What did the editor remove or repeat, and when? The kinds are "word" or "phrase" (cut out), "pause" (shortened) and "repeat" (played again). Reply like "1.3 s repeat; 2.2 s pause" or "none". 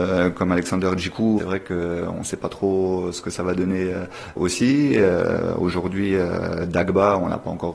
1.4 s phrase; 4.4 s word